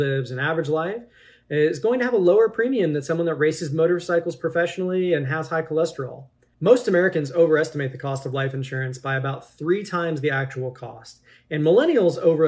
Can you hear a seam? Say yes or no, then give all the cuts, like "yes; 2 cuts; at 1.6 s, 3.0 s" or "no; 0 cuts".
no; 0 cuts